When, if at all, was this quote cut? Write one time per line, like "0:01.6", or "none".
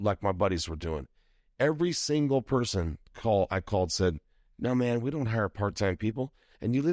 none